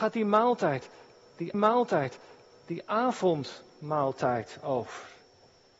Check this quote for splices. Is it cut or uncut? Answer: cut